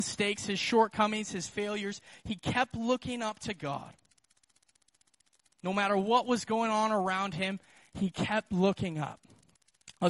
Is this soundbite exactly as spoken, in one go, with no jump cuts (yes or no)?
yes